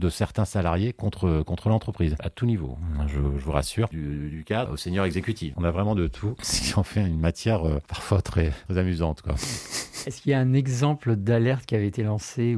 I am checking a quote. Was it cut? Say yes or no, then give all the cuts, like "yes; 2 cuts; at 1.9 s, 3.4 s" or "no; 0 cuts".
yes; 1 cut; at 4.7 s